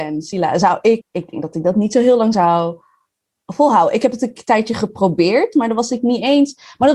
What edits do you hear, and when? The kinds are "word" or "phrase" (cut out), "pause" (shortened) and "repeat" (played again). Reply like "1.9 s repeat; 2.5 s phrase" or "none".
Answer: 1.0 s word